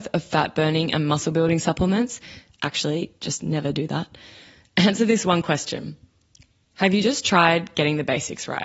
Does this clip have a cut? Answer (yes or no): no